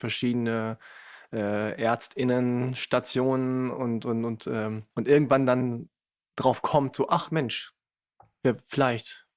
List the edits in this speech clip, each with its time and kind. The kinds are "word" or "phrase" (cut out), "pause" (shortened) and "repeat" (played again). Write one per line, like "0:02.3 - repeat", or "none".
0:04.9 - pause